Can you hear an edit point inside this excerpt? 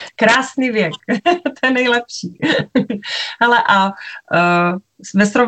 no; 0 cuts

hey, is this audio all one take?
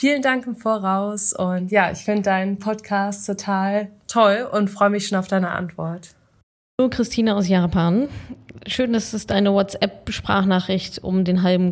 yes; 0 cuts

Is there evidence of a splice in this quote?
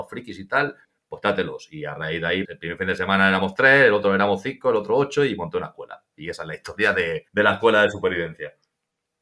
yes; 2 cuts; at 2.4 s, 7.3 s

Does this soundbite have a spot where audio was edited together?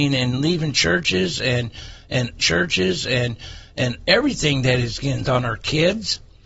yes; 2 cuts; at 2.4 s, 5.3 s

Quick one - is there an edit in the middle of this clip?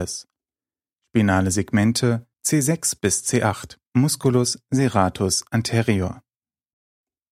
yes; 2 cuts; at 2.3 s, 3.9 s

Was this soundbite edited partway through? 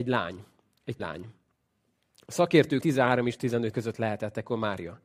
yes; 3 cuts; at 1.0 s, 2.8 s, 3.7 s

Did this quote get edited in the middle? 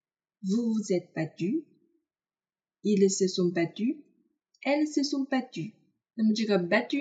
yes; 1 cut; at 6.0 s

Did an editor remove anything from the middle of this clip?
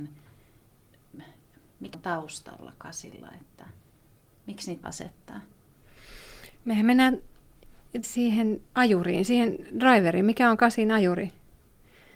yes; 4 cuts; at 1.9 s, 4.8 s, 8.0 s, 8.7 s

